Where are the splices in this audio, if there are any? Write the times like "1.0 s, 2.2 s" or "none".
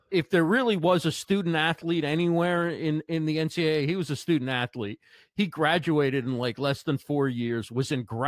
none